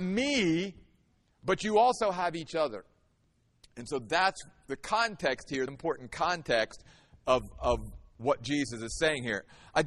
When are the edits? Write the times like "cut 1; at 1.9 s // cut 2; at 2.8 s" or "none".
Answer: cut 1; at 5.7 s